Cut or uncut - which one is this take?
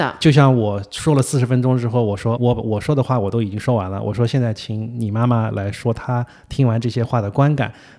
cut